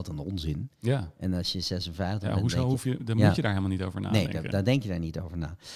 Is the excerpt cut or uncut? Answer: cut